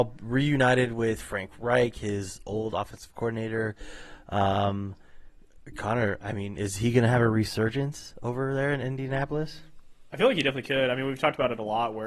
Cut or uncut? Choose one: uncut